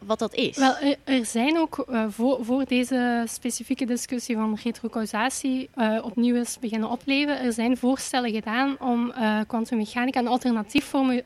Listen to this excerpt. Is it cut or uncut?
uncut